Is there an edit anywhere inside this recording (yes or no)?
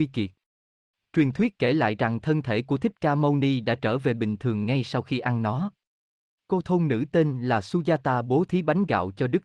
no